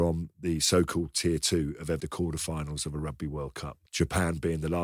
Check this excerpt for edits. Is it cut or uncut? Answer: cut